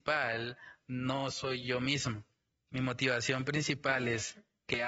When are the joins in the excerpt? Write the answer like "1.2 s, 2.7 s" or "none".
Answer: none